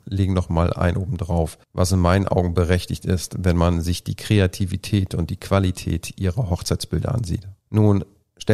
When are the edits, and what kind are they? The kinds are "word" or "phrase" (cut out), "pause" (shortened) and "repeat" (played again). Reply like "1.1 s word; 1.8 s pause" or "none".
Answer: 1.6 s pause; 7.6 s pause